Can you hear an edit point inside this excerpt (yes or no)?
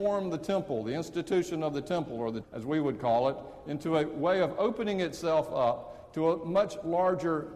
yes